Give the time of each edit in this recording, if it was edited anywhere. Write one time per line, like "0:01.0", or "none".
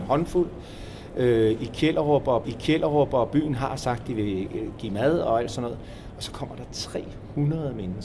0:02.4